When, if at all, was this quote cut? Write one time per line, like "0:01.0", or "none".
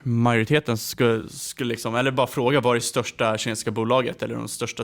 none